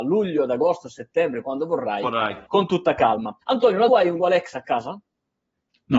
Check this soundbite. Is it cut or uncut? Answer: cut